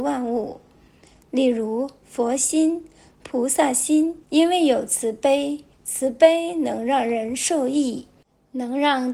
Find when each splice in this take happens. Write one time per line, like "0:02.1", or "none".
0:04.2
0:05.7